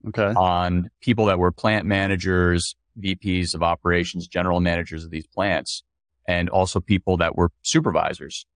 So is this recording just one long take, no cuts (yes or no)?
yes